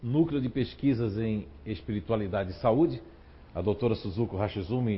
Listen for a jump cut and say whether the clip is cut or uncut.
uncut